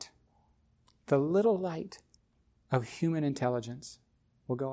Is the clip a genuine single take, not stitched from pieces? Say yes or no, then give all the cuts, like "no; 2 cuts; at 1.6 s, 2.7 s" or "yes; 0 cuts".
no; 1 cut; at 2.2 s